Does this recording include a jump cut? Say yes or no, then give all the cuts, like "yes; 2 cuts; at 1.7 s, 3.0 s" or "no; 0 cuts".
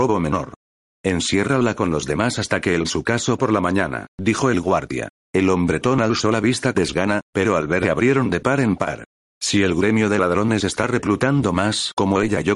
yes; 3 cuts; at 2.8 s, 6.7 s, 7.8 s